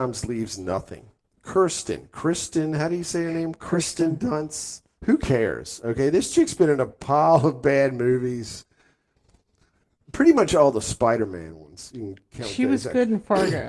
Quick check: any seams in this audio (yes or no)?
no